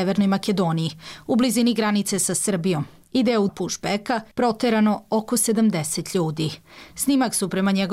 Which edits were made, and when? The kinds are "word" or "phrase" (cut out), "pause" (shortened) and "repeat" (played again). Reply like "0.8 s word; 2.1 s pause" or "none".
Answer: 3.5 s word; 4.3 s pause